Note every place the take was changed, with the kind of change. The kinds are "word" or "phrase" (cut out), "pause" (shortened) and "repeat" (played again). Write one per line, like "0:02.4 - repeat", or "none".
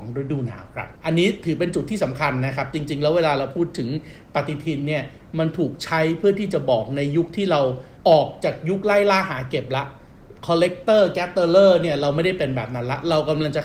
0:01.0 - pause
0:08.0 - pause
0:10.4 - pause